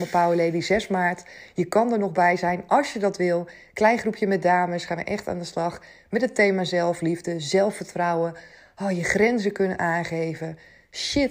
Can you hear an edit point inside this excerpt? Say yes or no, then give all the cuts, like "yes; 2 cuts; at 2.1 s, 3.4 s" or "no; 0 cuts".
no; 0 cuts